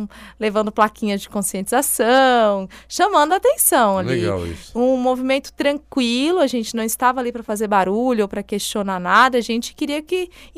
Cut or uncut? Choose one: uncut